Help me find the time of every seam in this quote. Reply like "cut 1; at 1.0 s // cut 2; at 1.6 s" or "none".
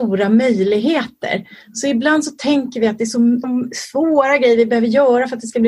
cut 1; at 3.4 s